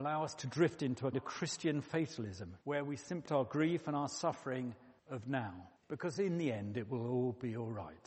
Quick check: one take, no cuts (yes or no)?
no